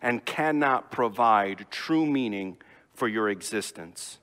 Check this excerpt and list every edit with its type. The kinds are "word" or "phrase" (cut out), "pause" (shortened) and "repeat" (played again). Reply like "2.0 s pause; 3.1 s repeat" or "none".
none